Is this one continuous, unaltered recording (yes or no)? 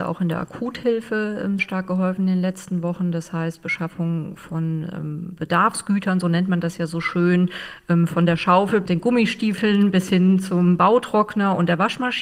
no